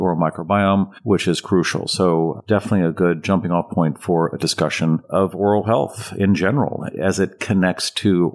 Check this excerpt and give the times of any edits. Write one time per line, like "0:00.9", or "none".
none